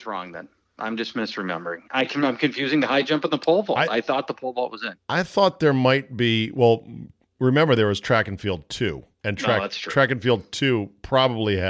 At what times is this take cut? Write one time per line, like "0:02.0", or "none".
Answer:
0:09.1